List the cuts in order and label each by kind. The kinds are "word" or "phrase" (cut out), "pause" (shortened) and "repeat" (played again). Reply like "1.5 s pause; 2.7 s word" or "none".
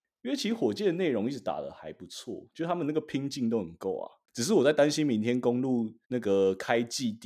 6.0 s pause